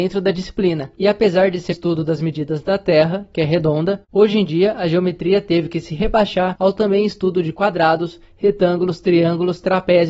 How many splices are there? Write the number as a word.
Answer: three